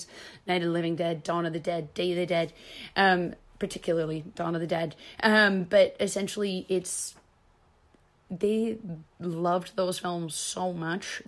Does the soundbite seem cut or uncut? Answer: uncut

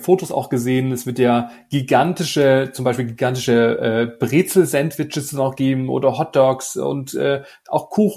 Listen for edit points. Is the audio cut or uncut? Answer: uncut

